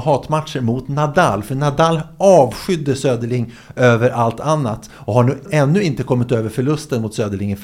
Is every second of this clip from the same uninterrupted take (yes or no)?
no